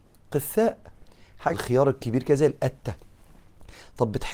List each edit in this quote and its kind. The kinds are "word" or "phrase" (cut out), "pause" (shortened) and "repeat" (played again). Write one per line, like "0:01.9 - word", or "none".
0:01.5 - word